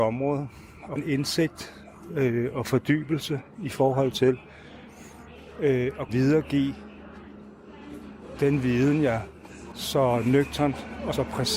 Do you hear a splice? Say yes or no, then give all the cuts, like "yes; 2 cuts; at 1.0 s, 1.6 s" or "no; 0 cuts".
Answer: yes; 4 cuts; at 1.0 s, 6.1 s, 8.4 s, 9.7 s